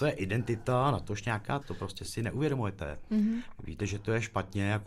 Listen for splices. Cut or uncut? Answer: cut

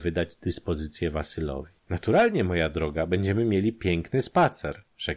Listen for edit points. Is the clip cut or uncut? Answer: cut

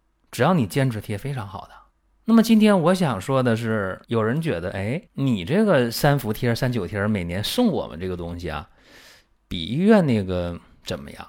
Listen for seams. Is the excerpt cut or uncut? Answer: cut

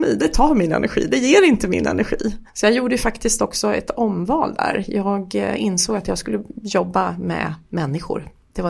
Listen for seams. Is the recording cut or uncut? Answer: cut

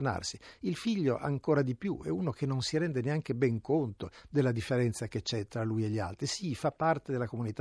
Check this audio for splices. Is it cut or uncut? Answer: uncut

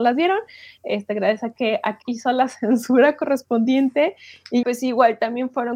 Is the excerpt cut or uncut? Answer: cut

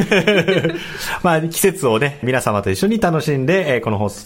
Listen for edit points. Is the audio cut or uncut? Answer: cut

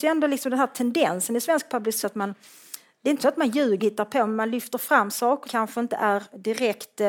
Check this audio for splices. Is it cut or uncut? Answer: cut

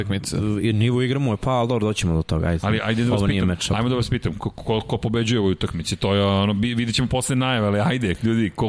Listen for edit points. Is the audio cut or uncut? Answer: uncut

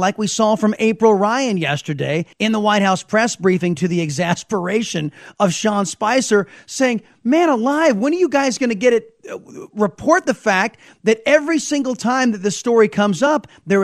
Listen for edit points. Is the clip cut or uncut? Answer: cut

